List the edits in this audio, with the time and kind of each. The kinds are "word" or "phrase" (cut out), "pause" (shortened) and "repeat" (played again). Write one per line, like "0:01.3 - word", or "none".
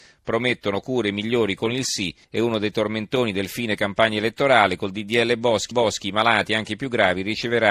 0:02.2 - pause
0:05.7 - repeat